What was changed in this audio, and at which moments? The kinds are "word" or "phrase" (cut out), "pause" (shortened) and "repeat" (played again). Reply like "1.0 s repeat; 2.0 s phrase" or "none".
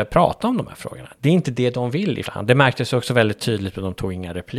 2.3 s word